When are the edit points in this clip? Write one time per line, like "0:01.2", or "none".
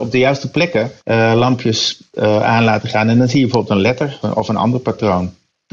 0:01.0
0:04.2